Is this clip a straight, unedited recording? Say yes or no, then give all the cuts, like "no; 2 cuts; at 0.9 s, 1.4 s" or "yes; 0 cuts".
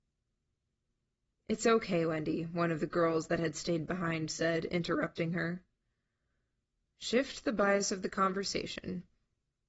yes; 0 cuts